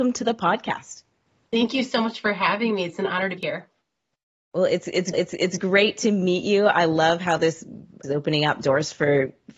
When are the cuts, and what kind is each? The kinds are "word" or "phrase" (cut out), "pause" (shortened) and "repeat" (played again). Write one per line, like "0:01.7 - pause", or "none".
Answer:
0:03.4 - word
0:05.1 - repeat
0:08.0 - phrase

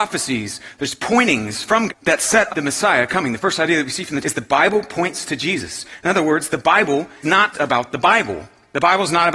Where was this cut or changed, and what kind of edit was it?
0:01.9 - word
0:02.5 - word
0:04.2 - word
0:07.2 - word
0:07.5 - word

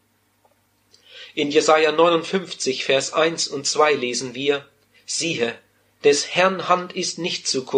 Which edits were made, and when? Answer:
none

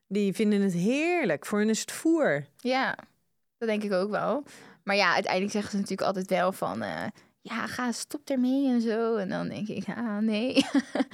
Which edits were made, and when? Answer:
none

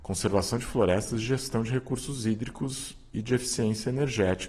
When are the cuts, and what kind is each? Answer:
none

